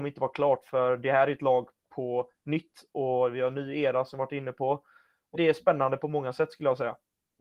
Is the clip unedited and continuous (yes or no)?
no